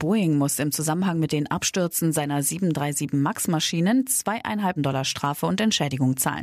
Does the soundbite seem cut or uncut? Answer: cut